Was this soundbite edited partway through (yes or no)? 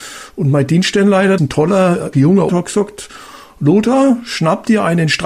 yes